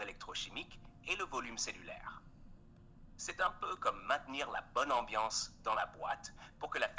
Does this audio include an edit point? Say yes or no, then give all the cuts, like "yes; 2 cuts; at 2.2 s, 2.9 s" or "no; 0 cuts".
no; 0 cuts